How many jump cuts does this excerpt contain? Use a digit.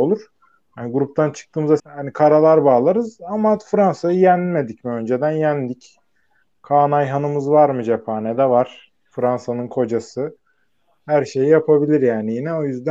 1